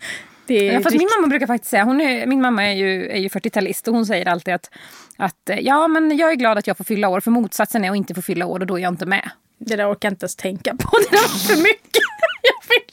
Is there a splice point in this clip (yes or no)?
no